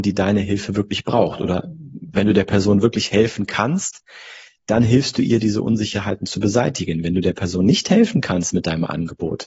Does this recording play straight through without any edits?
yes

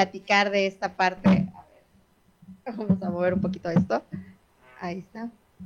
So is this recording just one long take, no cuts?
yes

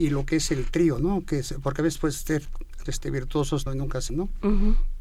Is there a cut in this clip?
yes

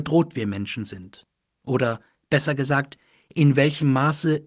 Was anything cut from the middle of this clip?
no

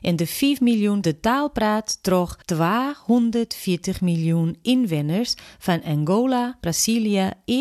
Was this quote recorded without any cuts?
no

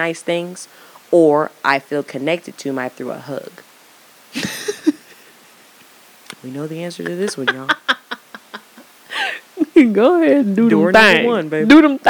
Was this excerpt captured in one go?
no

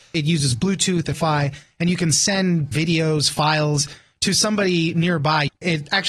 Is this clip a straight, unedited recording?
no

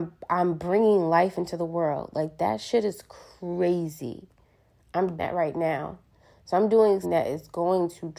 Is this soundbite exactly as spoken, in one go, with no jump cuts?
no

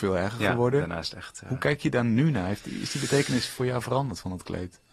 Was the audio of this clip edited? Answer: no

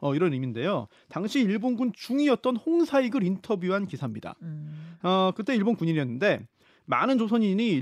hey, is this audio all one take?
yes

